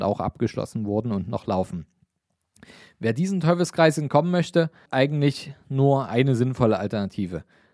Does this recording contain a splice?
yes; 1 cut; at 4.9 s

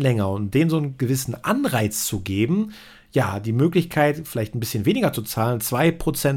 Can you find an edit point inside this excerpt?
no; 0 cuts

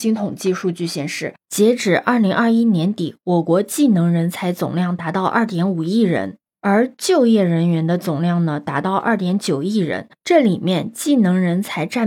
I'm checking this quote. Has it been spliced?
no; 0 cuts

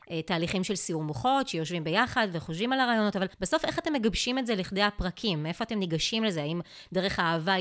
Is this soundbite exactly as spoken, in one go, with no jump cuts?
no; 1 cut; at 3.3 s

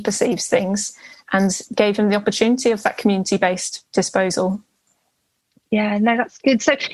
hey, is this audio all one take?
yes; 0 cuts

